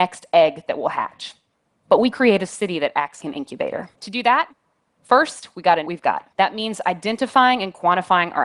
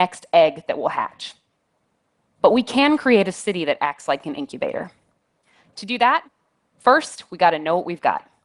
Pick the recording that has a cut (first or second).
first